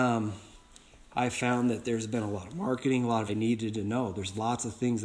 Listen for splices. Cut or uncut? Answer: cut